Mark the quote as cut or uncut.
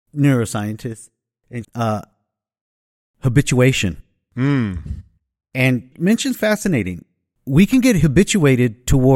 cut